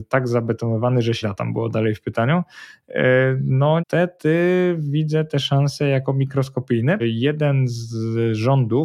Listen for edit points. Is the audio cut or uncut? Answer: cut